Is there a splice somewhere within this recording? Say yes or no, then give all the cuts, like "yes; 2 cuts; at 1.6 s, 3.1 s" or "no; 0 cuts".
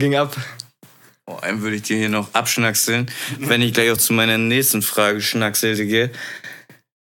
no; 0 cuts